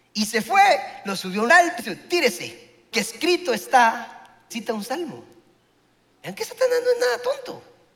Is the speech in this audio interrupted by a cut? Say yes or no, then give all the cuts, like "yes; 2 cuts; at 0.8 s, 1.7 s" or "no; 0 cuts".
yes; 4 cuts; at 1.5 s, 1.8 s, 2.9 s, 4.5 s